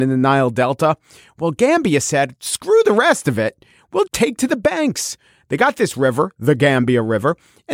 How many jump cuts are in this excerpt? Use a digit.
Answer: 1